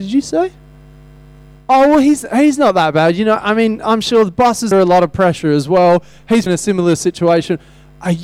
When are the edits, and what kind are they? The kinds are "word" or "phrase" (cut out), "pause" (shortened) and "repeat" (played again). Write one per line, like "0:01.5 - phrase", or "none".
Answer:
0:04.7 - word
0:06.5 - word